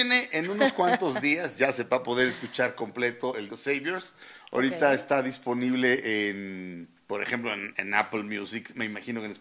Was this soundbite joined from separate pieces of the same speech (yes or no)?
yes